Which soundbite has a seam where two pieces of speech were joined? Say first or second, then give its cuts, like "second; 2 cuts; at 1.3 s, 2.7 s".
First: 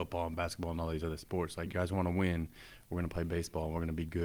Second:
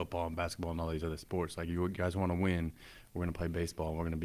first; 1 cut; at 1.7 s